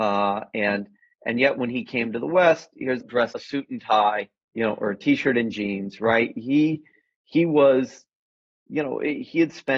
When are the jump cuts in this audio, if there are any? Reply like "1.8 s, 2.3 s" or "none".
3.0 s, 3.3 s, 4.4 s